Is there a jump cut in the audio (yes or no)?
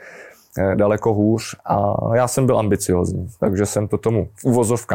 no